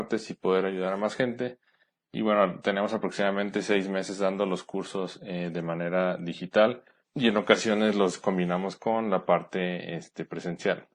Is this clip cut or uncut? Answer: uncut